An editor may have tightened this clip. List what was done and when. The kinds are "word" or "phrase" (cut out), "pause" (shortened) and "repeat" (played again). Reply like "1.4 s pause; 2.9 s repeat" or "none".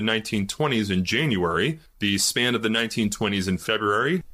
none